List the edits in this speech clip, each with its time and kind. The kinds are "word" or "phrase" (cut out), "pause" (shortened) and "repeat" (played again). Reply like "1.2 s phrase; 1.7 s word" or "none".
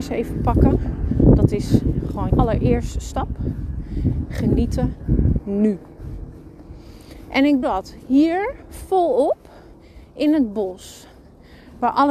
2.3 s word; 5.4 s phrase; 7.6 s word